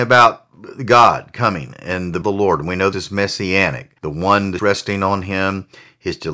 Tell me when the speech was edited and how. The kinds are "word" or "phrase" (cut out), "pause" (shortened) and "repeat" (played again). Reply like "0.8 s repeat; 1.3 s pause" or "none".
2.2 s phrase; 2.9 s word; 4.0 s pause; 4.6 s word